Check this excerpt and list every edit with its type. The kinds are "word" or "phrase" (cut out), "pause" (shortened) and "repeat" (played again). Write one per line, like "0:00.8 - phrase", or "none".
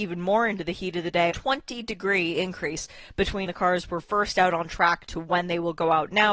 0:01.3 - word
0:03.5 - word